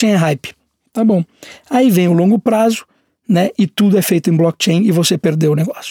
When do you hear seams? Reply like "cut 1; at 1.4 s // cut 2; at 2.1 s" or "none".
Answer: none